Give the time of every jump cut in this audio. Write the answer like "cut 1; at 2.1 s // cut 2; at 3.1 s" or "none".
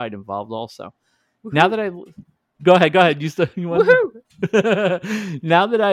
none